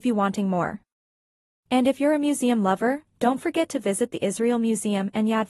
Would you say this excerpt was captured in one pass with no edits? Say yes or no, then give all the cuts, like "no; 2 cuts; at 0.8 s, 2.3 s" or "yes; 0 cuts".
yes; 0 cuts